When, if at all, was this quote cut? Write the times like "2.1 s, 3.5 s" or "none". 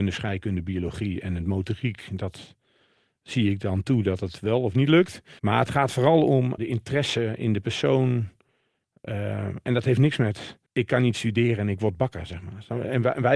5.4 s, 6.6 s, 10.7 s